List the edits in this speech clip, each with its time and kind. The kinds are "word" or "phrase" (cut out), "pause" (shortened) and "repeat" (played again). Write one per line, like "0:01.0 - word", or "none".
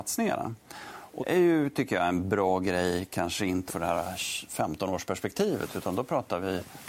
0:01.2 - word
0:03.7 - word